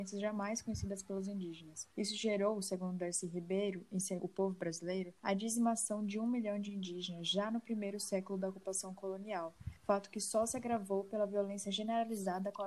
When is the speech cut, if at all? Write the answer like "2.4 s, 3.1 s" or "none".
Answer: 1.9 s, 4.2 s, 5.2 s, 9.8 s